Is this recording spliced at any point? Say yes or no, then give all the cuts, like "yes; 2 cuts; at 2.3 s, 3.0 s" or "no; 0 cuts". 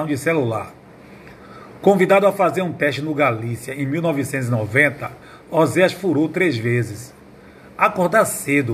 no; 0 cuts